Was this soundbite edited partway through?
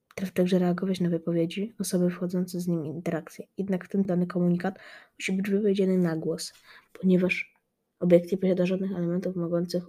yes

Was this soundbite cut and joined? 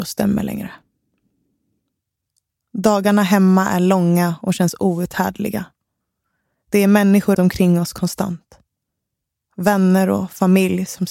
yes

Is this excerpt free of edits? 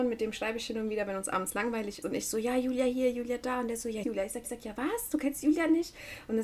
no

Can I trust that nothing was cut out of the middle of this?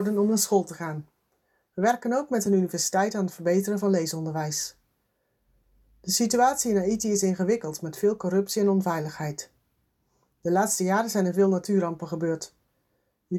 yes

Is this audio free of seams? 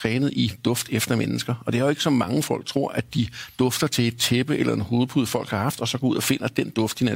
yes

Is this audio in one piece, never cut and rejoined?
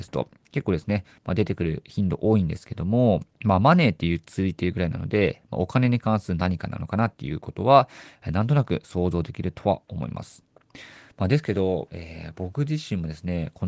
no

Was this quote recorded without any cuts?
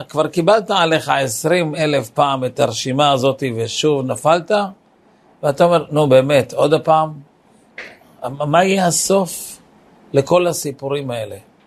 yes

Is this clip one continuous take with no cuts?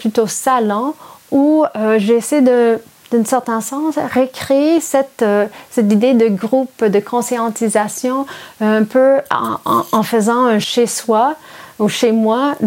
yes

